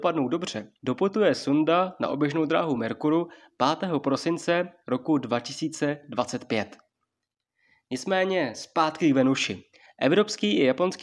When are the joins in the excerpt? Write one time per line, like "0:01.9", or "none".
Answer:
none